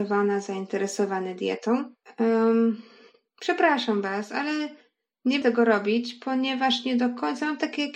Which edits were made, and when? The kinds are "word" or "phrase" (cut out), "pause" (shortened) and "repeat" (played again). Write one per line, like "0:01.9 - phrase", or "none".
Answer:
0:05.4 - word